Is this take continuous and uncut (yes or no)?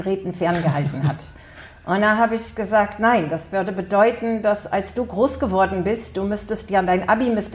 no